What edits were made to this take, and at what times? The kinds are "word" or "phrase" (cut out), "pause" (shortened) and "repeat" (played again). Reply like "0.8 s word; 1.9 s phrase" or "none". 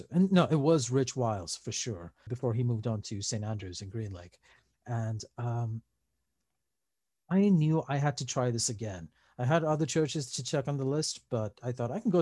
2.3 s word